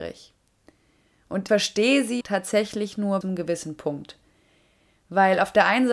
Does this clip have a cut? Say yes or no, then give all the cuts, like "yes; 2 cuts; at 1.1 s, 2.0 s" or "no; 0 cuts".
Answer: yes; 3 cuts; at 1.5 s, 2.2 s, 3.2 s